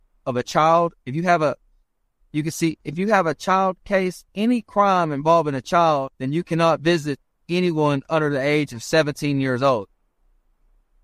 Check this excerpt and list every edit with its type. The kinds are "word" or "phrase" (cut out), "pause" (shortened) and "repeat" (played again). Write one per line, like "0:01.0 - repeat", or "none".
0:01.0 - pause
0:04.3 - pause
0:06.1 - pause
0:07.4 - pause